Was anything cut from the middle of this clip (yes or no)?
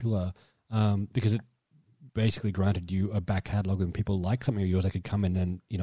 yes